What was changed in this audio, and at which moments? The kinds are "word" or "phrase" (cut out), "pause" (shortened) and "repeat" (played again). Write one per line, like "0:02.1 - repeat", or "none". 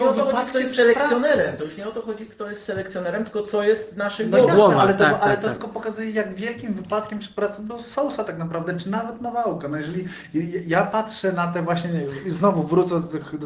none